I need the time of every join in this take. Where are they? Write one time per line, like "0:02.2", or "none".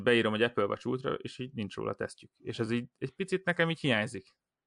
none